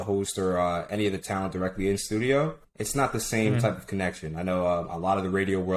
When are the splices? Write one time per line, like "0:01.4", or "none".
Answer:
0:02.6